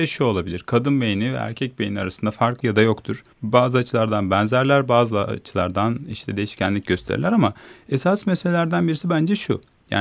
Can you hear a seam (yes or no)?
yes